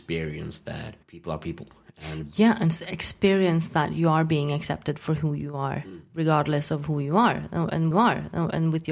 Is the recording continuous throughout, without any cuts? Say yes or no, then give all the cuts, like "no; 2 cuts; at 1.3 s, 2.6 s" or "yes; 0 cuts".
no; 2 cuts; at 1.0 s, 7.9 s